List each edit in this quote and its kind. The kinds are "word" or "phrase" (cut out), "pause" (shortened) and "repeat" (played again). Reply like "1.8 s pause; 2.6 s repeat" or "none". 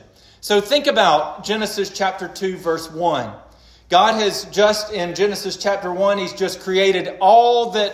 none